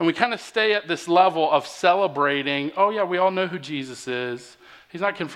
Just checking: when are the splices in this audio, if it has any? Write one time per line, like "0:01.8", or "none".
none